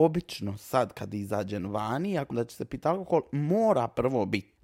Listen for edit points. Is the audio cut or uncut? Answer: cut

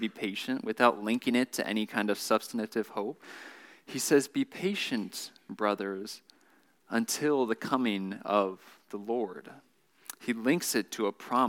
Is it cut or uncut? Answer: uncut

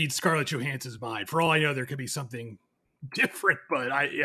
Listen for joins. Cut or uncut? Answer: uncut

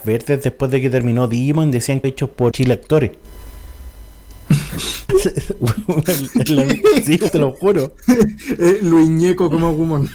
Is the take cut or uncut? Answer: cut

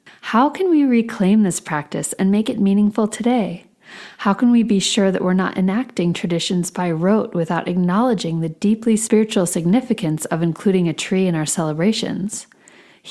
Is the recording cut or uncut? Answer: uncut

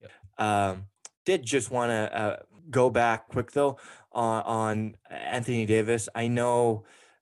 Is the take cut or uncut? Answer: cut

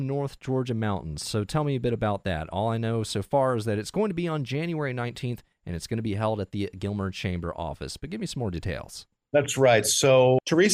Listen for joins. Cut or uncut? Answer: uncut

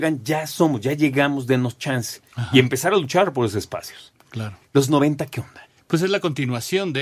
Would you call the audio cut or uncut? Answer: cut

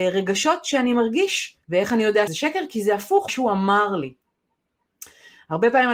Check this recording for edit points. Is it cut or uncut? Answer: cut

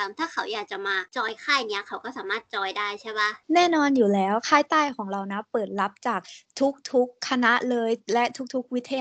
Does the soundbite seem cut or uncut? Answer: cut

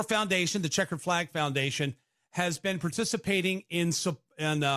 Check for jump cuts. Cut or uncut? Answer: uncut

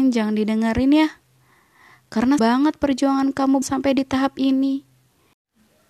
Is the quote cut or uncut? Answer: cut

